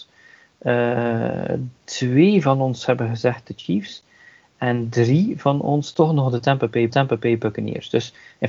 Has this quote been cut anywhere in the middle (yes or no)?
yes